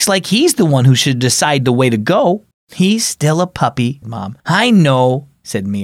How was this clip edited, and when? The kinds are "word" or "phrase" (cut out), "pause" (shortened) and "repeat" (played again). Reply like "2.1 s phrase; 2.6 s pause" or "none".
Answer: 2.5 s pause; 4.0 s word; 4.4 s pause